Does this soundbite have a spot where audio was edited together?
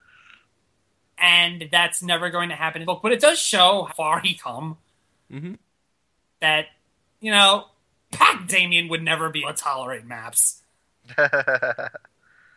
yes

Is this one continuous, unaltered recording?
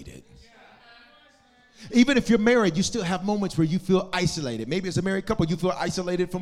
yes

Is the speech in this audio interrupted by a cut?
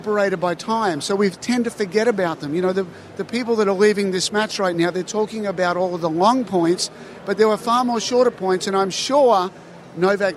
no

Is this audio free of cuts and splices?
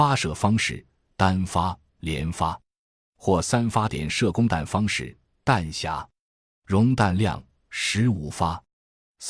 yes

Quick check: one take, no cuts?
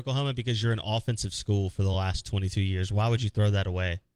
yes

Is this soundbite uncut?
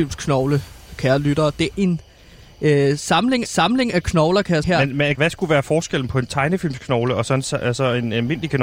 no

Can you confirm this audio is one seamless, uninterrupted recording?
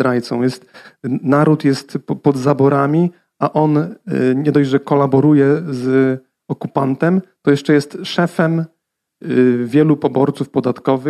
yes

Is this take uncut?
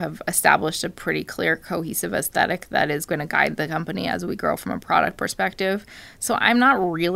yes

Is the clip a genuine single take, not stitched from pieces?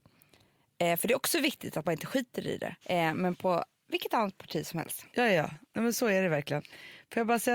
no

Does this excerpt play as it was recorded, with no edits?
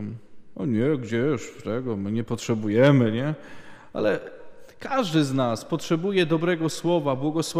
yes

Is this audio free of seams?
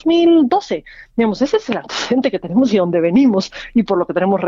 yes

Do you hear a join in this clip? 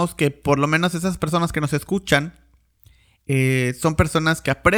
no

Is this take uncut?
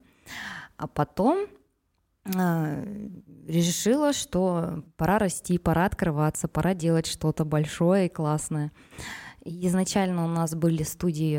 no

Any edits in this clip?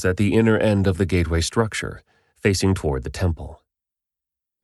no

